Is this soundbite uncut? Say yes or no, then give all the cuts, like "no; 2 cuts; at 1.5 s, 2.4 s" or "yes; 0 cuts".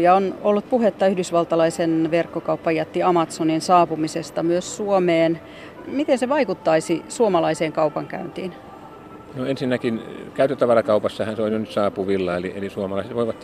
yes; 0 cuts